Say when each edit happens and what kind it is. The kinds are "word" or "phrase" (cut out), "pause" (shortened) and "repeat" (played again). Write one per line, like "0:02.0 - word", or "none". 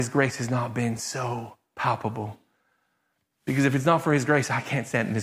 none